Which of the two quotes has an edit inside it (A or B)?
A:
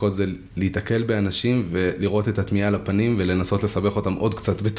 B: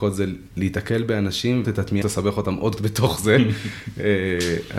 B